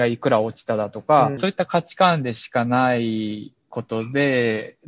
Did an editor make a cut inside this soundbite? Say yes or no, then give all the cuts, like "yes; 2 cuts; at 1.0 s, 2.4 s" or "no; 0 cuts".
yes; 1 cut; at 1.4 s